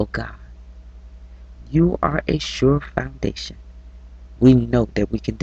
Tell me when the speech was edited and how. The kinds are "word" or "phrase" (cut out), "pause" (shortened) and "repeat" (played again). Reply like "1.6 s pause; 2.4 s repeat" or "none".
none

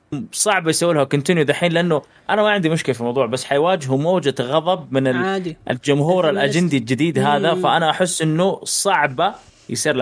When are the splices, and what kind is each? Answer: none

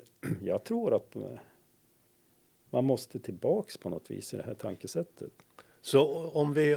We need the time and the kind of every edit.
none

